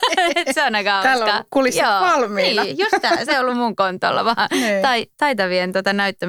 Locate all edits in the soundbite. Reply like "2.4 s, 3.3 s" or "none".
none